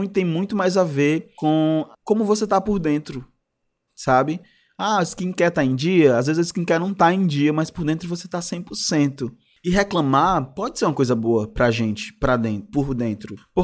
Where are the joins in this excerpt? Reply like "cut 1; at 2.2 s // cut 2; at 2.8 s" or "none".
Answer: none